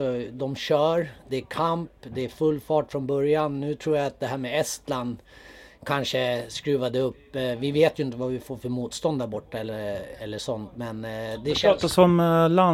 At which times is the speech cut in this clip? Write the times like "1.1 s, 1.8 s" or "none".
none